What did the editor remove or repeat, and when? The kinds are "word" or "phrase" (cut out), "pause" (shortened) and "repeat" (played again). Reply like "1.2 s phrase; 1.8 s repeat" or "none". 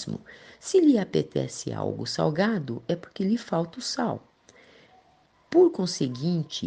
none